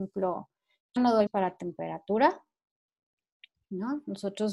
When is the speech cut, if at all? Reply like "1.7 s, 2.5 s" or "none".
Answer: 1.0 s, 1.3 s